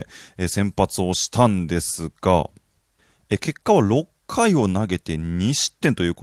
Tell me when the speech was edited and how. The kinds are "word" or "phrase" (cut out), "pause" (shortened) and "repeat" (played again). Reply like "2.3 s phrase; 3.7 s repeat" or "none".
none